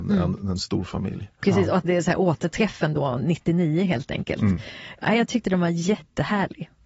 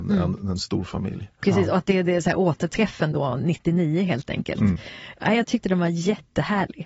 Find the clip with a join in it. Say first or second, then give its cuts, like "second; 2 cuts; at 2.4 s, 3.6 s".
first; 1 cut; at 1.8 s